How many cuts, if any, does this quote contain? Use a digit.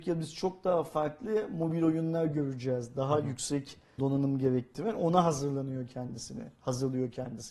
1